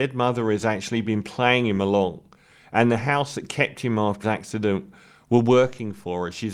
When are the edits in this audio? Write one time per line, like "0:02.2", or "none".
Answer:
0:04.2